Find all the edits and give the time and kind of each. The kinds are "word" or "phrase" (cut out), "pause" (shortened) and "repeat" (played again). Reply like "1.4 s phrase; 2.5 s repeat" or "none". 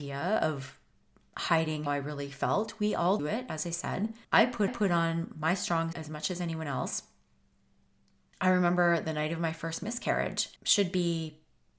1.9 s word; 3.2 s word; 4.2 s pause; 4.7 s repeat; 5.9 s word; 10.6 s pause